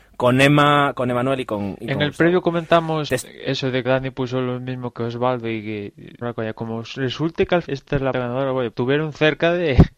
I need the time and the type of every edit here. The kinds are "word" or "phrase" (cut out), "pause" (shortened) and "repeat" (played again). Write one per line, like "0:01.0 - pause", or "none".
0:03.1 - word
0:03.8 - word
0:04.9 - word
0:06.2 - word
0:07.6 - word
0:08.1 - word
0:08.7 - word

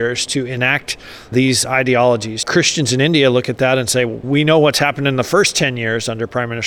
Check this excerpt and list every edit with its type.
0:01.3 - word

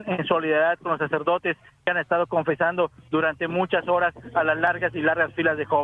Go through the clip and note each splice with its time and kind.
none

